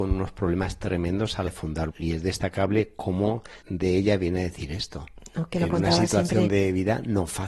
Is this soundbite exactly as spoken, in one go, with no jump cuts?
no; 3 cuts; at 1.5 s, 1.9 s, 3.6 s

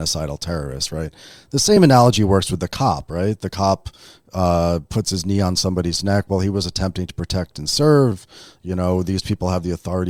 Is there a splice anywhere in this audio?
no; 0 cuts

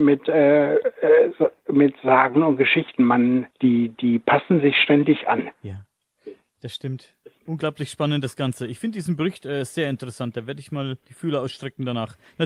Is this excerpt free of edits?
no; 3 cuts; at 3.5 s, 5.5 s, 11.0 s

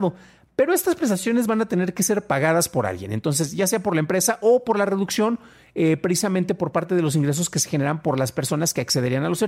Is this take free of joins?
yes; 0 cuts

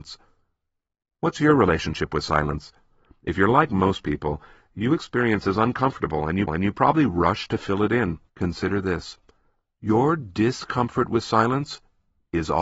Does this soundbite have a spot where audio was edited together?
yes; 3 cuts; at 5.4 s, 6.5 s, 8.3 s

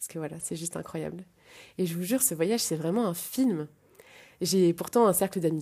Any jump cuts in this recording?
no; 0 cuts

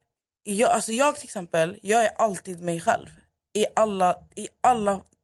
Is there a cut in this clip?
no; 0 cuts

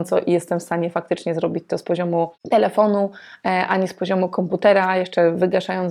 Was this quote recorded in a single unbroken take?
yes; 0 cuts

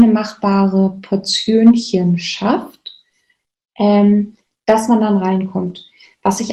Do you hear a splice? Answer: no; 0 cuts

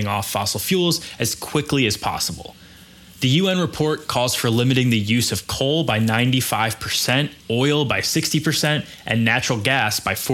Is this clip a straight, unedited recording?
no; 1 cut; at 7.4 s

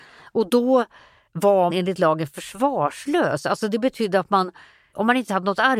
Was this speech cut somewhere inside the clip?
yes; 1 cut; at 1.7 s

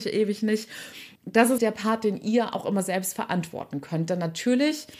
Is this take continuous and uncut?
no; 2 cuts; at 1.2 s, 1.6 s

